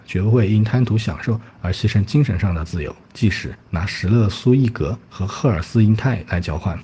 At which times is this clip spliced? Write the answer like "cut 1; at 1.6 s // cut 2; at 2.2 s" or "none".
cut 1; at 3.0 s // cut 2; at 3.6 s // cut 3; at 5.0 s